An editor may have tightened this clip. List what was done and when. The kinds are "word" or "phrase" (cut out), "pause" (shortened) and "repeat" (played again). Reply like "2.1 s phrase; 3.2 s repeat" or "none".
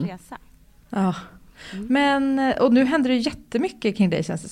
none

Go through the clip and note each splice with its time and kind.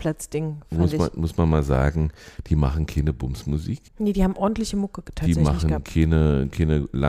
3.9 s pause

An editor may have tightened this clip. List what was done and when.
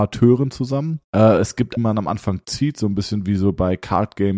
1.1 s pause; 1.8 s phrase

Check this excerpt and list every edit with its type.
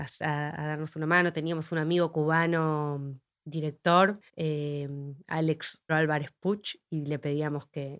4.3 s pause; 5.9 s word

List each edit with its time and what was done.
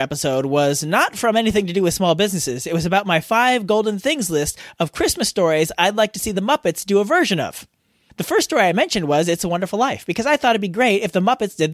none

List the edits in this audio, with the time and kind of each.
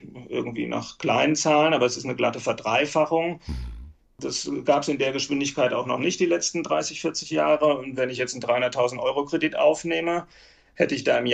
none

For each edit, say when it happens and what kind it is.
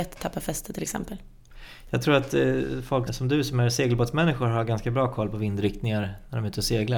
3.1 s word

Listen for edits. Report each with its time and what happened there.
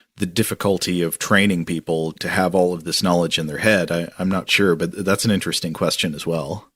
2.1 s word; 4.5 s word

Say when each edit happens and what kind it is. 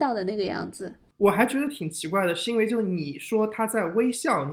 none

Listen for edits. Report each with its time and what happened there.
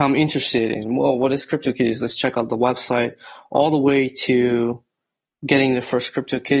none

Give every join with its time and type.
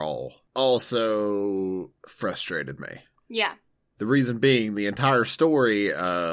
none

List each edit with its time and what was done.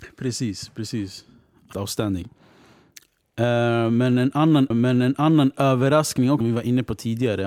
1.7 s phrase; 4.7 s repeat; 6.4 s word

